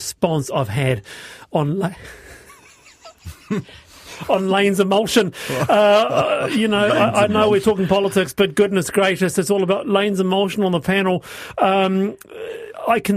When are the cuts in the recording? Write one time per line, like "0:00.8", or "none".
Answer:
none